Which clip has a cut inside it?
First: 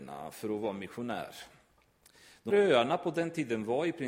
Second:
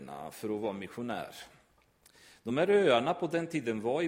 first; 1 cut; at 2.5 s

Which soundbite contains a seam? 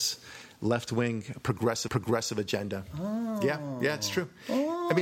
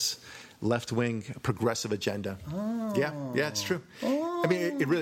first; 1 cut; at 1.9 s

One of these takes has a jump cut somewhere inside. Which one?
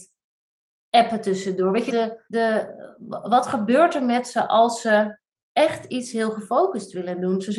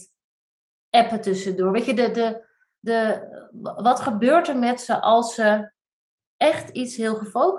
first; 3 cuts; at 1.9 s, 2.3 s, 5.4 s

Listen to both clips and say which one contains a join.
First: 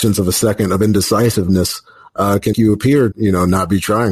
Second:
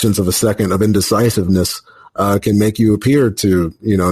first; 2 cuts; at 2.5 s, 3.1 s

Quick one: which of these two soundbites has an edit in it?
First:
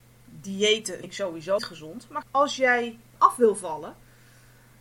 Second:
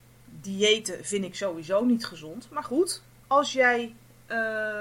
first; 4 cuts; at 1.0 s, 1.6 s, 2.2 s, 3.2 s

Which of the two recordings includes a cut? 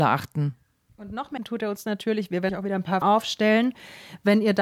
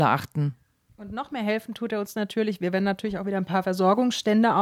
first; 3 cuts; at 1.4 s, 2.5 s, 3.0 s

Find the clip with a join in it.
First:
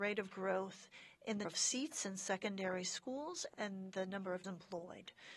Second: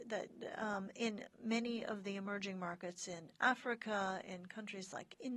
first; 2 cuts; at 1.4 s, 4.4 s

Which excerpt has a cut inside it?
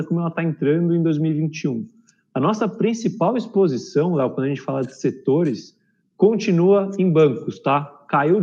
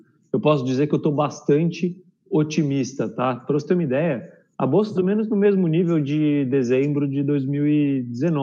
second; 1 cut; at 5.0 s

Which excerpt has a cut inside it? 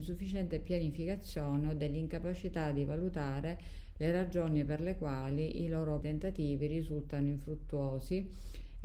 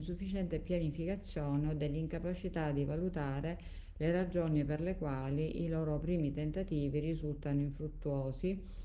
first; 1 cut; at 6.0 s

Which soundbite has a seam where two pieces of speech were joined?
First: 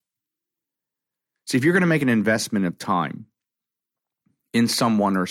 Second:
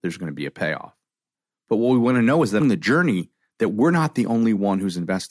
second; 2 cuts; at 1.3 s, 2.6 s

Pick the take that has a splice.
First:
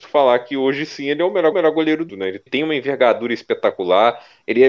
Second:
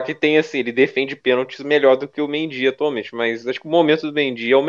first; 3 cuts; at 1.5 s, 2.1 s, 2.5 s

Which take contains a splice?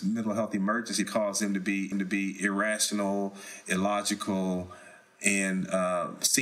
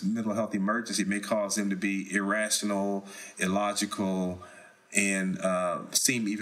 first; 2 cuts; at 1.0 s, 1.9 s

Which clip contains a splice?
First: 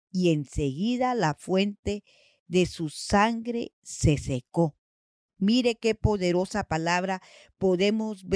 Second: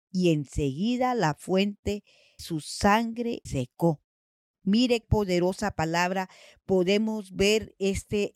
second; 3 cuts; at 2.4 s, 3.5 s, 5.0 s

